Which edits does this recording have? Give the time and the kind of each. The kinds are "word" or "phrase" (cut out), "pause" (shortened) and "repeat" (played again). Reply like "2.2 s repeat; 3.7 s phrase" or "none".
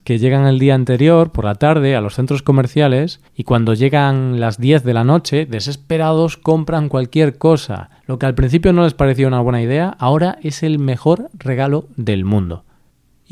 3.3 s pause; 8.0 s pause